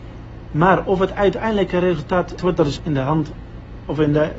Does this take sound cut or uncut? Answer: cut